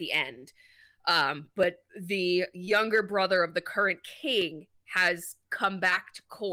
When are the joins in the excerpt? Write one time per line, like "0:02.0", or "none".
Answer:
0:01.9
0:04.7